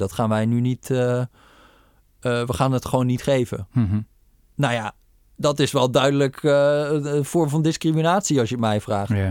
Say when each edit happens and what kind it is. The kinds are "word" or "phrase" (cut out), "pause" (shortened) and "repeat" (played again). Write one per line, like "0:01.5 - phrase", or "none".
none